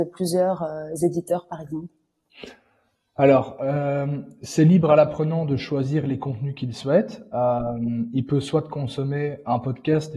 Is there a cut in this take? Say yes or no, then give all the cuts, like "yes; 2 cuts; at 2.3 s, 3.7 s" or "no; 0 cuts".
no; 0 cuts